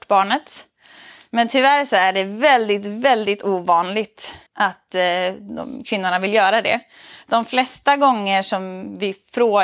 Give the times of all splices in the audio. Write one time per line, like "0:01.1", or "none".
0:04.5